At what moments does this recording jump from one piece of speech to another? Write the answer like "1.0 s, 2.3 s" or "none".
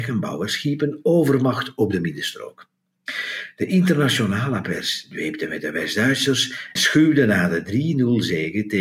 6.8 s